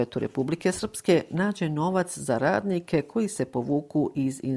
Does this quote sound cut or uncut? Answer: uncut